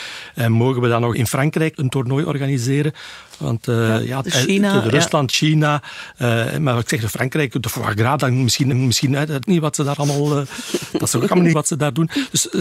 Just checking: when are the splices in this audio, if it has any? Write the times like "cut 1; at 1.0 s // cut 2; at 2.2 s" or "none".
cut 1; at 1.1 s // cut 2; at 4.2 s // cut 3; at 8.7 s // cut 4; at 9.4 s // cut 5; at 11.5 s